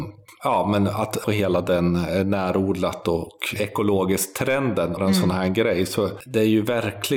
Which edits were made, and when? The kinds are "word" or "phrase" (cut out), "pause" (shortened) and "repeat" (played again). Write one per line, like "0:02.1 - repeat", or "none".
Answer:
0:01.2 - phrase
0:03.6 - word
0:05.0 - phrase